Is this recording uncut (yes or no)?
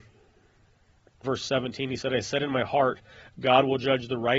no